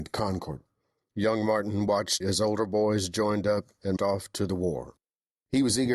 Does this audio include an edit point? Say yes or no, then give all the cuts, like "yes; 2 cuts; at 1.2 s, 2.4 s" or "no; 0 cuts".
yes; 2 cuts; at 2.2 s, 4.0 s